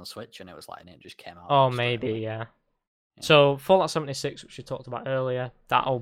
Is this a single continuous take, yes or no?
yes